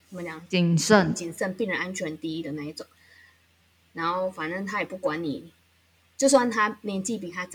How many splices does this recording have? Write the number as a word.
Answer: one